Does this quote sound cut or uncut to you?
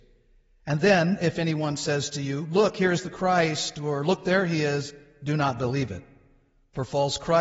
uncut